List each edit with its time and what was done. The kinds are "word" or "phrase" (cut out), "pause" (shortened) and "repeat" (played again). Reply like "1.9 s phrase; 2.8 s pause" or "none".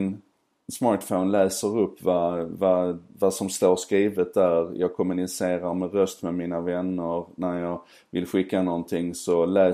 none